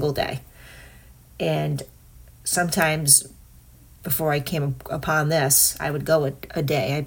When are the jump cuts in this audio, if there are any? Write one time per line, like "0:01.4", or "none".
none